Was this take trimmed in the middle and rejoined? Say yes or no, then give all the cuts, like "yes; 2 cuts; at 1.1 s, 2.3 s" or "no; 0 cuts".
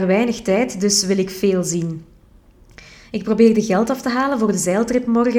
no; 0 cuts